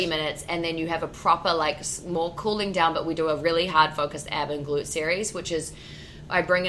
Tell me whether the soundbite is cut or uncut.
uncut